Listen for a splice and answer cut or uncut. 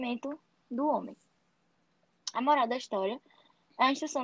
uncut